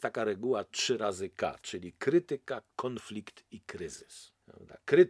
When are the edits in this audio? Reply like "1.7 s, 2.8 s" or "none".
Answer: none